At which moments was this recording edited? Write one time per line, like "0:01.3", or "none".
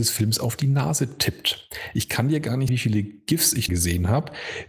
0:02.7
0:03.7